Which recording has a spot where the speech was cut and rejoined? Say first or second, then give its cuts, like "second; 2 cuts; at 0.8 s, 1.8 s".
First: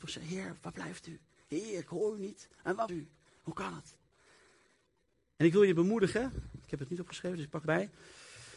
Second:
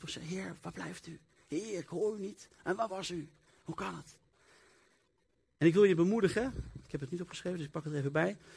first; 2 cuts; at 2.9 s, 7.6 s